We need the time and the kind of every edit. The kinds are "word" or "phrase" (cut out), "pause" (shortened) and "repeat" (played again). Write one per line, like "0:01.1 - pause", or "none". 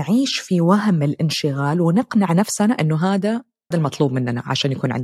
0:03.7 - word